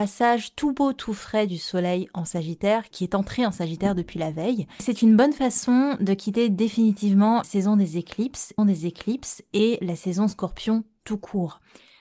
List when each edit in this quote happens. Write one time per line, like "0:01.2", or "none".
0:02.9
0:07.4
0:08.6